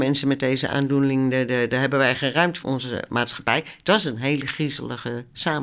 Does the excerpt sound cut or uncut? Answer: cut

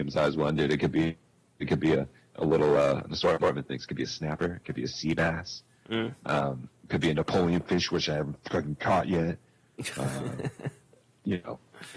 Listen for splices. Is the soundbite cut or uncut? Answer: uncut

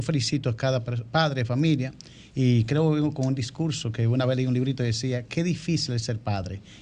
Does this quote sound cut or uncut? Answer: uncut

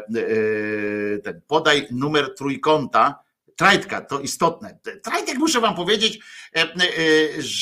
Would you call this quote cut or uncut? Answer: uncut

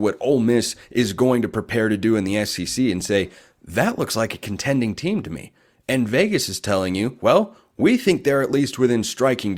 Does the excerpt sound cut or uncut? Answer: uncut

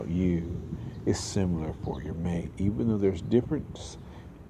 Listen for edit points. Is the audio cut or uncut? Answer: uncut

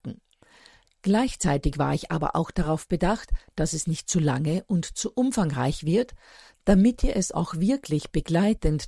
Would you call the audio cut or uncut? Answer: uncut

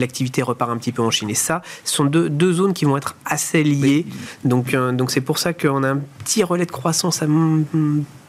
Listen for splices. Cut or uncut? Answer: uncut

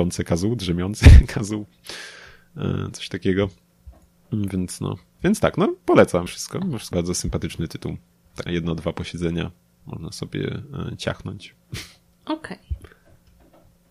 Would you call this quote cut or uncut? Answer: cut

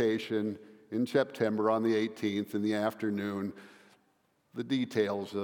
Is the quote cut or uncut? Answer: uncut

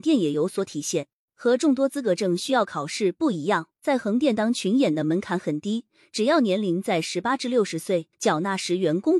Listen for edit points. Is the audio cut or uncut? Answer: cut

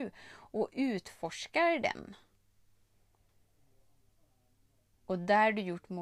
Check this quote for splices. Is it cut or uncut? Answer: uncut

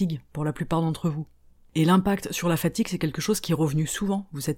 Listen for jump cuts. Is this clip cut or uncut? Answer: uncut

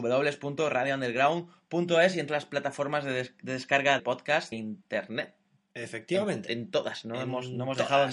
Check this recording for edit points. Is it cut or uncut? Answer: cut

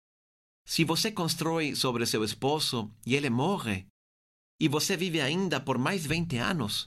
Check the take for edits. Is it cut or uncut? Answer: cut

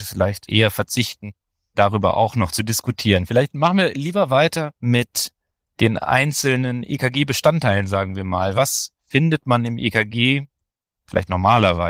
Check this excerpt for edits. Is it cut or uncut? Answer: uncut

